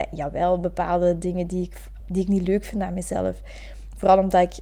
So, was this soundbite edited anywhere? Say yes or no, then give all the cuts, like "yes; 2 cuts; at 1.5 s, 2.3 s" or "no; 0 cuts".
yes; 1 cut; at 2.0 s